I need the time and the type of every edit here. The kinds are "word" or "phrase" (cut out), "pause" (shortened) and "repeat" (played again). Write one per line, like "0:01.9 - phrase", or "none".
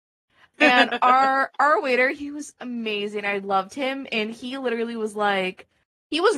none